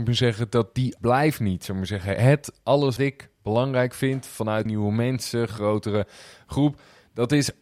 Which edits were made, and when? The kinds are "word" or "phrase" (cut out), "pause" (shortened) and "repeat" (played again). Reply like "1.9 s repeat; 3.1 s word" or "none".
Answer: 1.0 s word; 3.0 s word; 4.7 s phrase